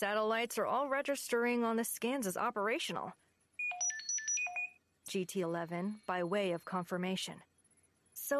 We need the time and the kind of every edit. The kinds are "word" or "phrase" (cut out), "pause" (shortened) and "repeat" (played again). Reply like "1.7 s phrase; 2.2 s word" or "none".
5.1 s word

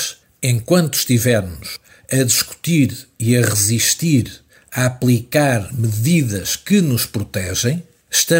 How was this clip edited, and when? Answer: none

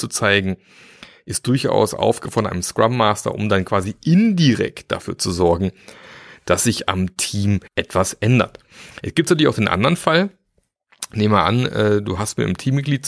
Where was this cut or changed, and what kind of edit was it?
7.7 s pause

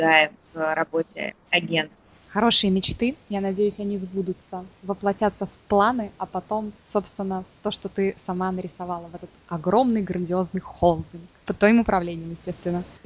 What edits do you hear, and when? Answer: 6.8 s pause

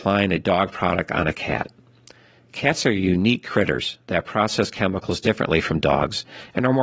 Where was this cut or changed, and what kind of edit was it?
none

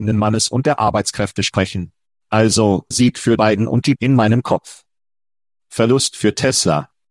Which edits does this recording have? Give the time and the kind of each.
2.9 s word; 3.4 s word; 4.0 s word

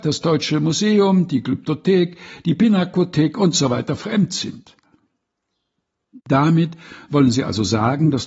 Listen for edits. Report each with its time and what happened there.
none

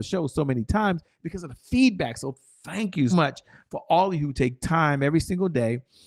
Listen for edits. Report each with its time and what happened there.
3.1 s word

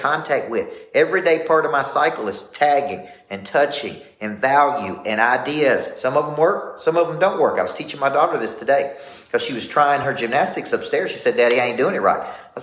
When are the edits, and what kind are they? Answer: none

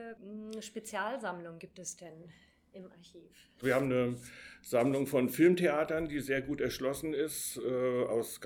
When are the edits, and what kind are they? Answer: none

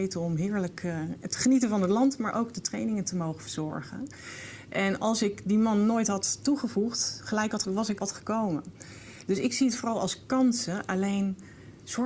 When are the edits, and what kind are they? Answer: 7.6 s word; 8.0 s phrase

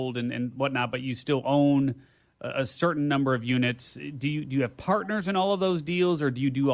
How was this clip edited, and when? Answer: none

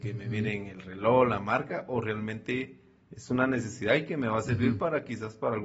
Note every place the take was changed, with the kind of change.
none

